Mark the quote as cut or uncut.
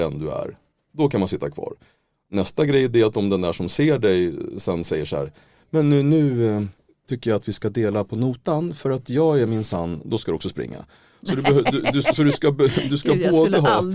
uncut